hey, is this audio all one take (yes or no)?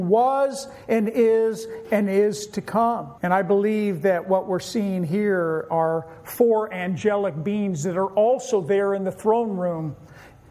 no